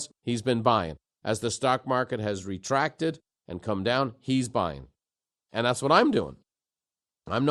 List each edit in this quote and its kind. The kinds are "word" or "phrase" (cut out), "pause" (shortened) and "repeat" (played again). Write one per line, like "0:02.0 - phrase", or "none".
none